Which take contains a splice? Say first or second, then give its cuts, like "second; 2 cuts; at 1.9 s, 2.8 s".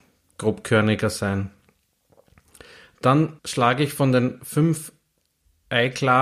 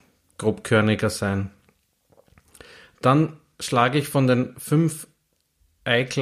first; 1 cut; at 3.4 s